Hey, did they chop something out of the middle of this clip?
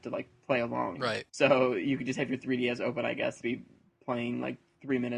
yes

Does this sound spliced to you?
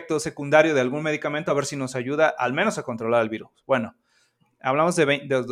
no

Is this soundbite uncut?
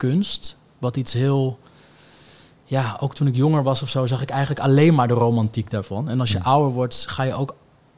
yes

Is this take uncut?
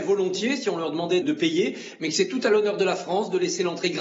no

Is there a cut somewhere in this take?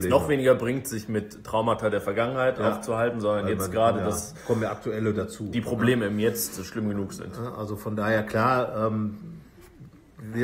no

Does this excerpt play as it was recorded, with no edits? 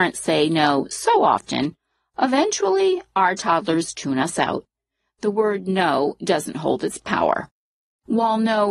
yes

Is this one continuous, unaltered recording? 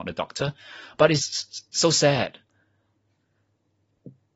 no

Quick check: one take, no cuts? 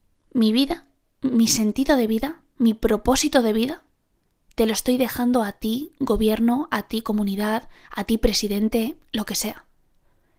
yes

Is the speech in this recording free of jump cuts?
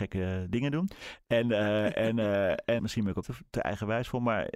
no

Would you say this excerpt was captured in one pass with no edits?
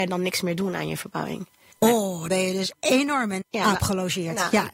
no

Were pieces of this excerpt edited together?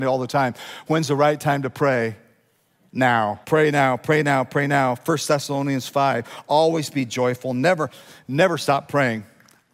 yes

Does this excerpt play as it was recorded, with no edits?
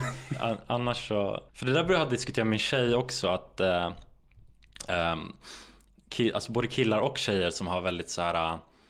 no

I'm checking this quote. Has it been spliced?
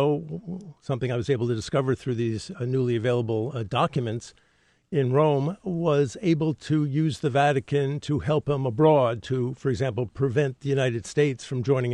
no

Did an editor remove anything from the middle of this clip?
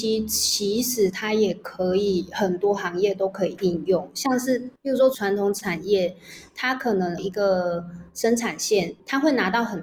yes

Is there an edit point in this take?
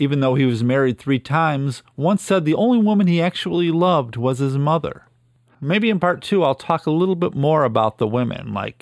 no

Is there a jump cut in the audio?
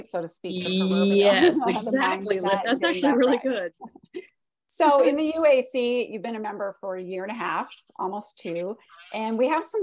no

